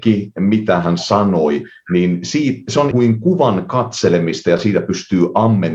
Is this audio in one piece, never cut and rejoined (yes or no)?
no